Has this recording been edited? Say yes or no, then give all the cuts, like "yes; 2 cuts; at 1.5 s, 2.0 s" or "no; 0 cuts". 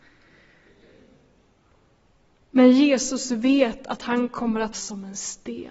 yes; 1 cut; at 4.7 s